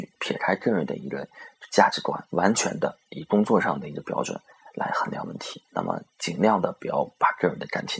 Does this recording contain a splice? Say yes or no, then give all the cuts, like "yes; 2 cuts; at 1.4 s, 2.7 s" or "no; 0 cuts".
yes; 2 cuts; at 2.3 s, 5.7 s